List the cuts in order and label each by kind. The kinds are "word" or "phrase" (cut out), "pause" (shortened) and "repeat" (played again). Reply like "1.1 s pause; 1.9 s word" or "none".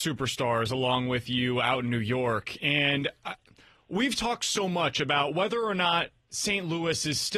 none